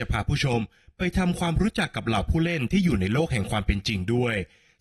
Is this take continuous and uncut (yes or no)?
yes